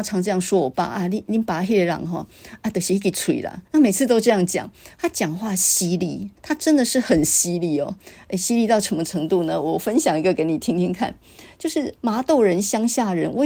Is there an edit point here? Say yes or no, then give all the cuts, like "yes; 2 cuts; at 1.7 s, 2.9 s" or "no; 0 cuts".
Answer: yes; 3 cuts; at 3.7 s, 6.4 s, 12.0 s